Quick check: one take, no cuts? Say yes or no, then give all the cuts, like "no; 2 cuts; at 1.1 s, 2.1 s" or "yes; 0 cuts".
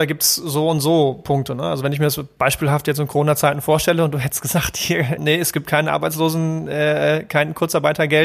no; 1 cut; at 5.2 s